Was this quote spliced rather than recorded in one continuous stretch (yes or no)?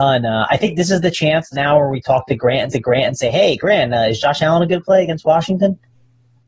yes